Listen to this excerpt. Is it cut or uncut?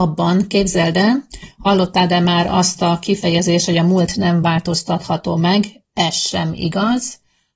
uncut